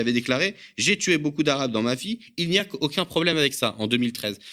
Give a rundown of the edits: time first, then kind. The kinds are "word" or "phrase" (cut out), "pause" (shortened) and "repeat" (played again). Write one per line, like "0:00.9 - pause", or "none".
none